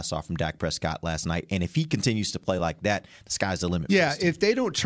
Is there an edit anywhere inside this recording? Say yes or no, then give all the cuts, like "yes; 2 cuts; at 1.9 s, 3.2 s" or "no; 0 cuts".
no; 0 cuts